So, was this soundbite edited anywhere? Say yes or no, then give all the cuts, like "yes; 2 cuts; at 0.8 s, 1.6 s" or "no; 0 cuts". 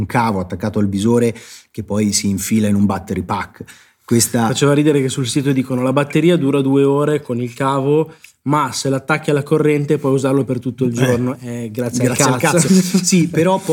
no; 0 cuts